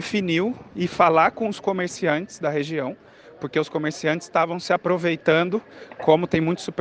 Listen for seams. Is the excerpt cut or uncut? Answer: uncut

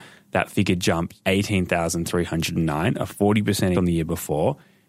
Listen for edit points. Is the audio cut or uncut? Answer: cut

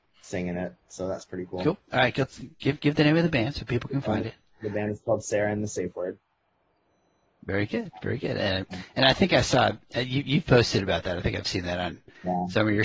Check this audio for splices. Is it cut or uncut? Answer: uncut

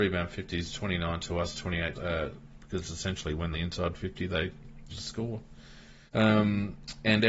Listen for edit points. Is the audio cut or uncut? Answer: cut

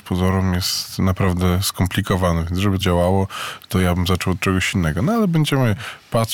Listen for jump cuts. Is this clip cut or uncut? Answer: cut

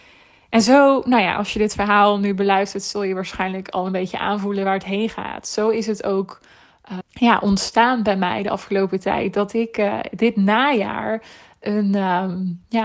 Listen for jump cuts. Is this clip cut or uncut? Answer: cut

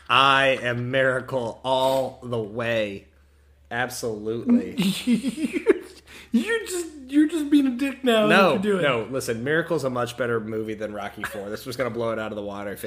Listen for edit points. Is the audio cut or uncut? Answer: uncut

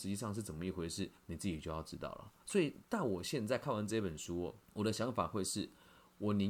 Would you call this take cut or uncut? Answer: cut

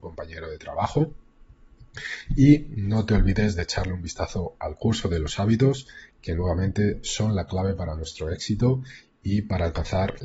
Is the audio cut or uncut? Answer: uncut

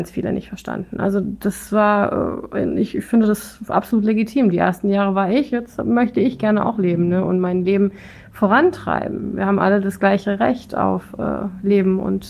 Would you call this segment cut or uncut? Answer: uncut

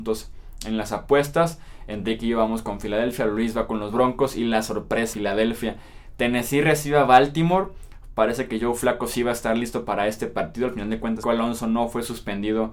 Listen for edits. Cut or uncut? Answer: cut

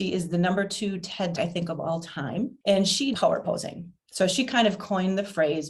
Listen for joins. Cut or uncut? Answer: cut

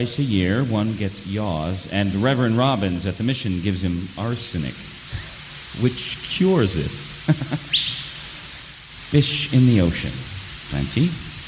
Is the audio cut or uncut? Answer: uncut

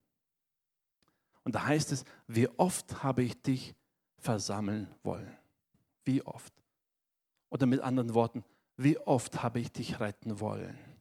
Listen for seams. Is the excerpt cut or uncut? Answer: uncut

